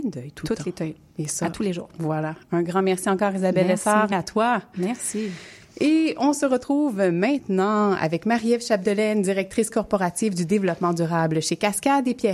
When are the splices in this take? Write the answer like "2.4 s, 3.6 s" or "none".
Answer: 4.1 s